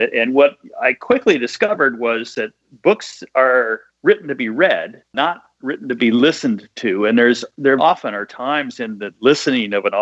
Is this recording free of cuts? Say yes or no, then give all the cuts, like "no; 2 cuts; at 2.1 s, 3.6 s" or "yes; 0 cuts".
no; 1 cut; at 7.8 s